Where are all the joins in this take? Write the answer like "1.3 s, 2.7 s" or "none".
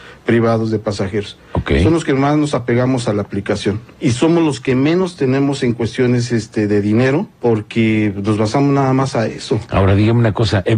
3.9 s, 7.3 s